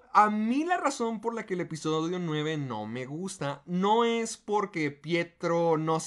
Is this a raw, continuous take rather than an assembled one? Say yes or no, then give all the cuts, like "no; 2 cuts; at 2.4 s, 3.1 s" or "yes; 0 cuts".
yes; 0 cuts